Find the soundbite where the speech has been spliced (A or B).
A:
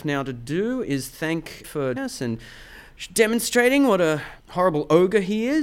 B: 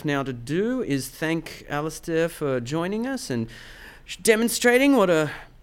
A